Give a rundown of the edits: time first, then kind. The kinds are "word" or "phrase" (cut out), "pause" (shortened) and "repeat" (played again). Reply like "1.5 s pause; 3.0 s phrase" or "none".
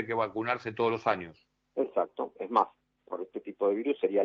none